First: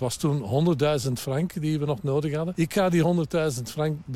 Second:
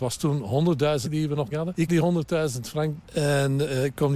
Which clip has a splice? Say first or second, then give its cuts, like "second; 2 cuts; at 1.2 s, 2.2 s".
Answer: second; 4 cuts; at 1.0 s, 1.5 s, 1.9 s, 3.0 s